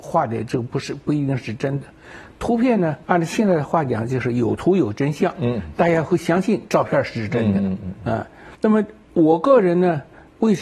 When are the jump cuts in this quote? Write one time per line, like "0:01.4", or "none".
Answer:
0:03.0
0:08.5

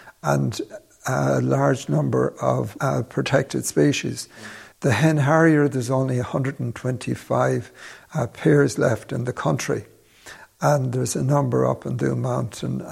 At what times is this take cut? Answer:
0:04.7

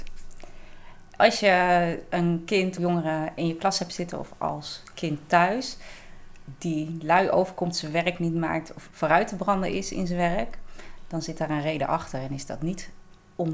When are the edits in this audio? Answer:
0:02.8
0:08.9

